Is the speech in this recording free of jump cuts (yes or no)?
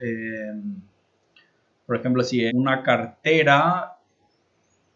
no